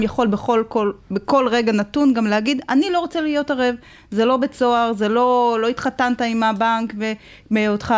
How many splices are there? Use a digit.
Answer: 0